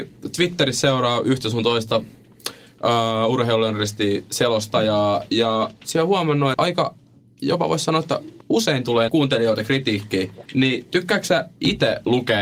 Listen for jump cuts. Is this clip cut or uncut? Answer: cut